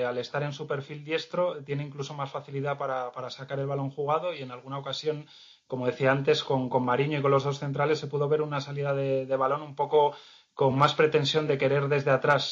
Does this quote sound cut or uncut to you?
uncut